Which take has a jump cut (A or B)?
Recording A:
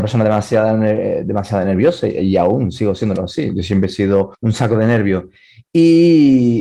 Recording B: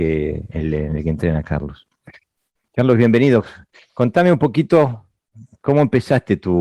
A